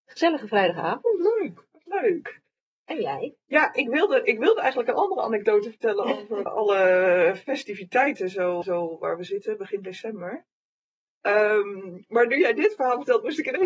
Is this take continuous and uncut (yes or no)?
no